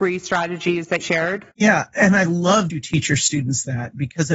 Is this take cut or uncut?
cut